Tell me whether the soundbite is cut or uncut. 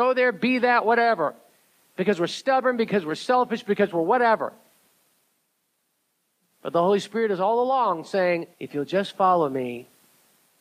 cut